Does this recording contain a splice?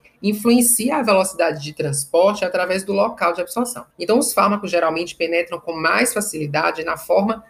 yes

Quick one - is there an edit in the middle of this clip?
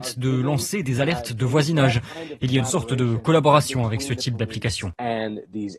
no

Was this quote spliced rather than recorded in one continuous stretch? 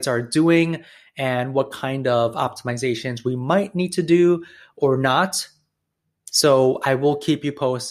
no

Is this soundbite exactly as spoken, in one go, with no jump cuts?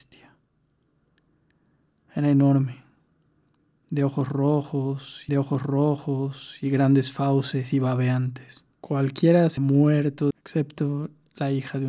no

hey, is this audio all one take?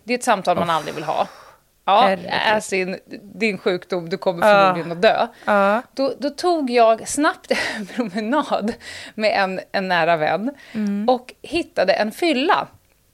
yes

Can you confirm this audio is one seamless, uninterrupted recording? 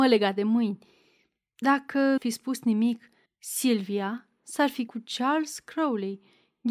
no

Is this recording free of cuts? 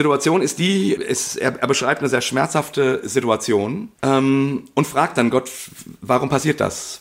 no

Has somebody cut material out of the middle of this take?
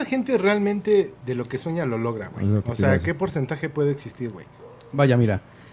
no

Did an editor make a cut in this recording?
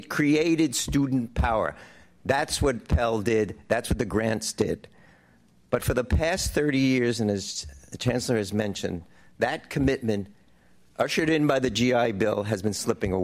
no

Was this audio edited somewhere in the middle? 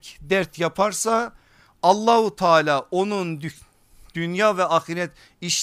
no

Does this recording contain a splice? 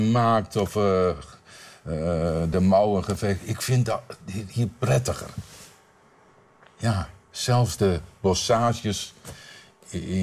no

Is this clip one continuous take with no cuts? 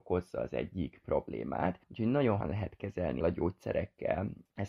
no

